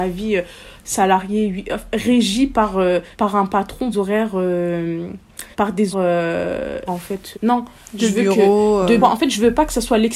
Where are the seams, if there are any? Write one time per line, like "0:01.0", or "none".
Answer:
0:03.1
0:03.9
0:05.5
0:05.9
0:06.9
0:07.3
0:09.0